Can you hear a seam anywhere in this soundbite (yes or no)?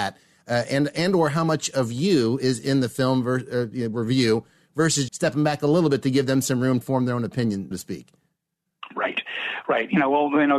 yes